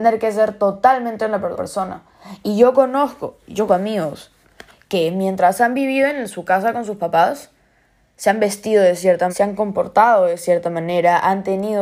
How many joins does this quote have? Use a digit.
3